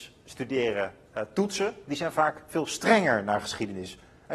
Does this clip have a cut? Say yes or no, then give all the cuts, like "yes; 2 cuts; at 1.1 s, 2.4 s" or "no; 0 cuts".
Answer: no; 0 cuts